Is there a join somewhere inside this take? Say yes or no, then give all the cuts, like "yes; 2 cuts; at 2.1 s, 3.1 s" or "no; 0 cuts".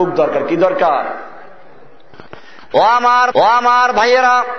yes; 1 cut; at 3.3 s